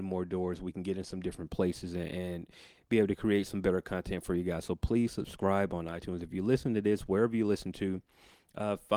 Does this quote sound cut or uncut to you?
uncut